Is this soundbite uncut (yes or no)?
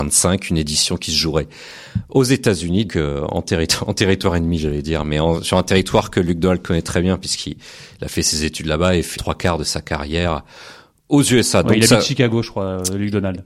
no